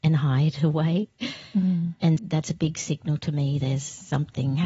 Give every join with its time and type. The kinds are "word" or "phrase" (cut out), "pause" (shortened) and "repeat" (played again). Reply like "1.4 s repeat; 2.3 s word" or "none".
2.2 s word